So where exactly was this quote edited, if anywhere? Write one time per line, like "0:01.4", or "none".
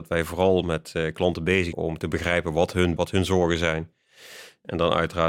0:01.7
0:03.0